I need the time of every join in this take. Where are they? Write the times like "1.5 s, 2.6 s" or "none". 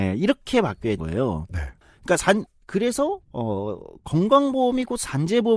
1.0 s, 2.5 s, 3.2 s